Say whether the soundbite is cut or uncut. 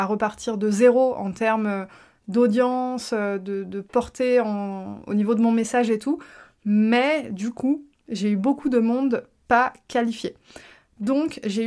uncut